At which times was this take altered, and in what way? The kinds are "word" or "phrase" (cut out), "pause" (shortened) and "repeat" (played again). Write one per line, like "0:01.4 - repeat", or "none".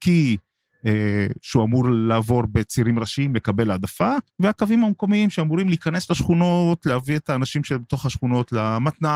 0:04.3 - pause